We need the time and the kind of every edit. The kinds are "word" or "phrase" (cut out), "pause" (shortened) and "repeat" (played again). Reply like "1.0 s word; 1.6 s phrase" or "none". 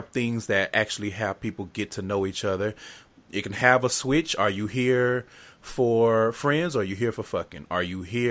none